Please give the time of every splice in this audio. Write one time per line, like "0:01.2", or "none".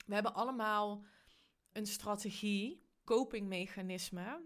0:01.7
0:03.1